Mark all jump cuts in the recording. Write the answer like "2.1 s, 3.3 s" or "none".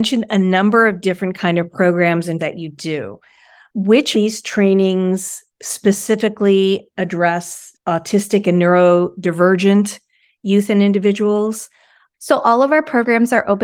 2.4 s, 4.1 s, 7.7 s